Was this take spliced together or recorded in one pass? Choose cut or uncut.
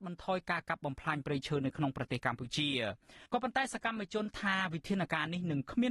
cut